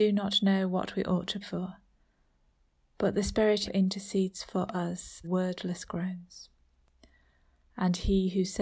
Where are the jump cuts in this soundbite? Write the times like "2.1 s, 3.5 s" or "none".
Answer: 1.4 s, 3.7 s, 5.2 s